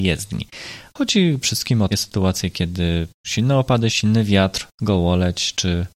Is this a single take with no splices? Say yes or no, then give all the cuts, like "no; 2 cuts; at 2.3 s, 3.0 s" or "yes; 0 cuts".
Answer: no; 5 cuts; at 1.4 s, 1.9 s, 3.2 s, 3.9 s, 4.7 s